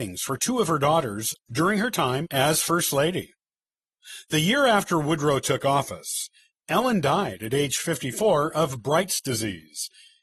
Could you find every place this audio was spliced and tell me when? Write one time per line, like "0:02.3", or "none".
none